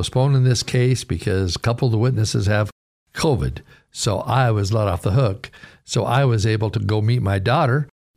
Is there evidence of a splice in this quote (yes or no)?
no